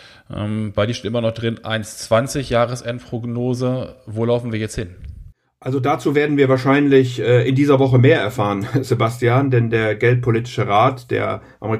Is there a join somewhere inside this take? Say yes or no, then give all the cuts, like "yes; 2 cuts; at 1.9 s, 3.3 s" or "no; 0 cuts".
no; 0 cuts